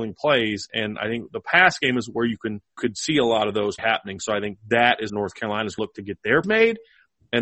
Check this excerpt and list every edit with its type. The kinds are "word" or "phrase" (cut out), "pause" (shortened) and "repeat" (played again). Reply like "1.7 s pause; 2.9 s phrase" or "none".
2.8 s word; 3.8 s word; 5.1 s word; 5.8 s word; 6.4 s word